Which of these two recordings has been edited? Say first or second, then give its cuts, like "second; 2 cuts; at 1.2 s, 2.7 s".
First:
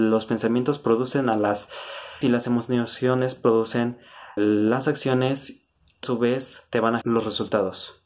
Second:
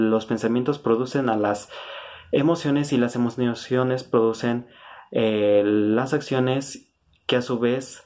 first; 4 cuts; at 2.2 s, 4.4 s, 6.0 s, 7.0 s